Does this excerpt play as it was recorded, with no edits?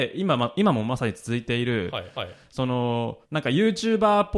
no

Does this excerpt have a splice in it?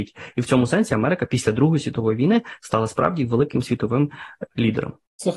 yes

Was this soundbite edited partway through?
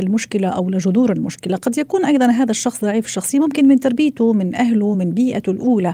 no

